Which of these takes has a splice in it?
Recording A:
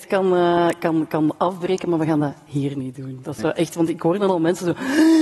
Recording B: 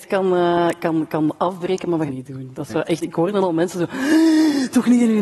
B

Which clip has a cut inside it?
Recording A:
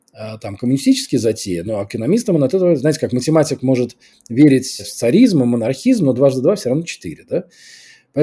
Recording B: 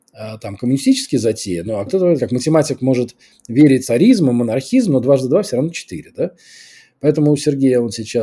B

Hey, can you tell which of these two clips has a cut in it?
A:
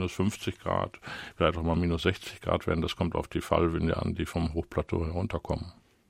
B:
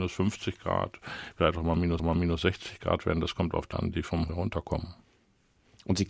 B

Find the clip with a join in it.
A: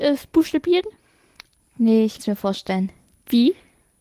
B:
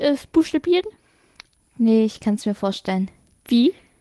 A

